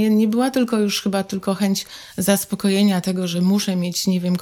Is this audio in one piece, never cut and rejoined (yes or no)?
yes